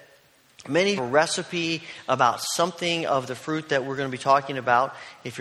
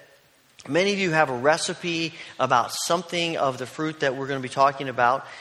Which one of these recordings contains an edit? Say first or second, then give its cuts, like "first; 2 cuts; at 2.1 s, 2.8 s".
first; 1 cut; at 1.0 s